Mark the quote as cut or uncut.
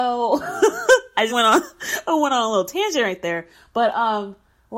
cut